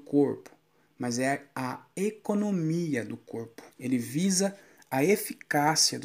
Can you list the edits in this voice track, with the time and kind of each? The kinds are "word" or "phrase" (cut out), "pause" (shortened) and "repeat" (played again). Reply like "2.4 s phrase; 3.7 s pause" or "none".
3.7 s pause